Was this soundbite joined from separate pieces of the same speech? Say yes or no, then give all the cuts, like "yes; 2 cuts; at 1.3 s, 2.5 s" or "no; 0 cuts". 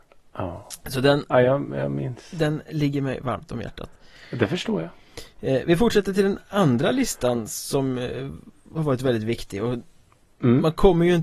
no; 0 cuts